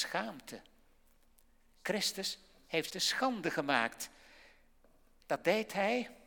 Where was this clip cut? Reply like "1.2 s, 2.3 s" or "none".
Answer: 2.9 s